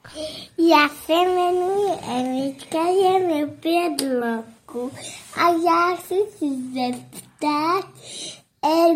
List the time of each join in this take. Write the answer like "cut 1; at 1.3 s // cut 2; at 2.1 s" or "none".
none

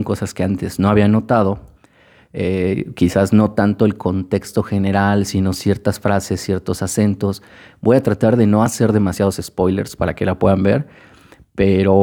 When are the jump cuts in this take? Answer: none

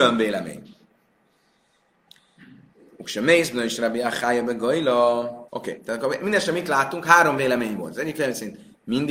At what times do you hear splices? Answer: cut 1; at 5.5 s

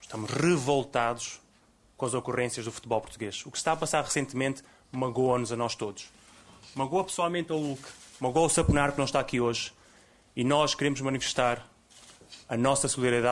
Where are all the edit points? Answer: none

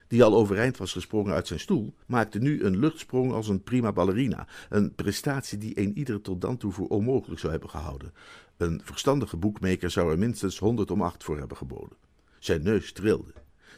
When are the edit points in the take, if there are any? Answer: cut 1; at 2.0 s

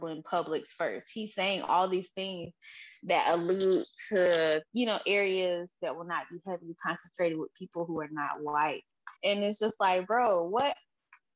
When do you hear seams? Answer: cut 1; at 4.7 s // cut 2; at 9.2 s

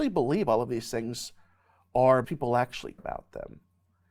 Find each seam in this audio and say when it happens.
cut 1; at 2.2 s // cut 2; at 3.0 s

